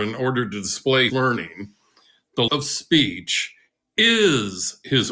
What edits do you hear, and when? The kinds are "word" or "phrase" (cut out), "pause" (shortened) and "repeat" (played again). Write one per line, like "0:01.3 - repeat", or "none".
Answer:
0:01.1 - word
0:02.5 - word